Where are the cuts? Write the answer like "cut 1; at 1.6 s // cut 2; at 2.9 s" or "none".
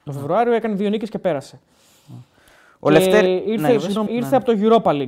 cut 1; at 4.1 s